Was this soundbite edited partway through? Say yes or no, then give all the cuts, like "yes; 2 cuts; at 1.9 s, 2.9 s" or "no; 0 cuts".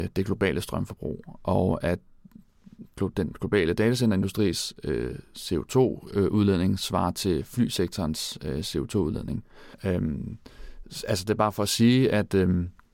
yes; 1 cut; at 9.7 s